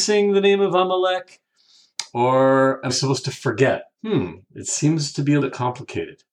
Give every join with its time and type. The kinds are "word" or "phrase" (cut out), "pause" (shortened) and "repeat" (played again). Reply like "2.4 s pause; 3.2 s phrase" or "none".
2.9 s word; 3.9 s pause; 5.4 s word